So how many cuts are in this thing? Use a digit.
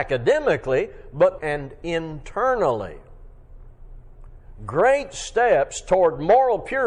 1